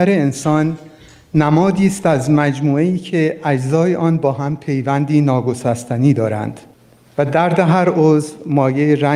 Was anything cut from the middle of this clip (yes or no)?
no